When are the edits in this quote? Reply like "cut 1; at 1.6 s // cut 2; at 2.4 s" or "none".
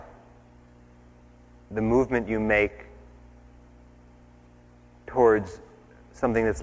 none